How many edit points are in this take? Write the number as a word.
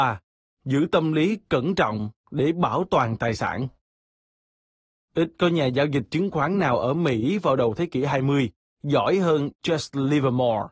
zero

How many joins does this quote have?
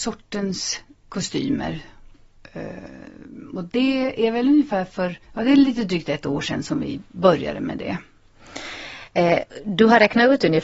one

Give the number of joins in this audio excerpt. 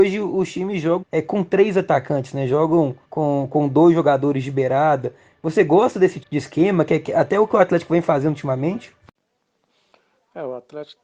three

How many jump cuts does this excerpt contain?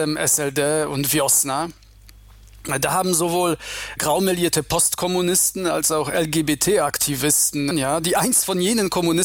two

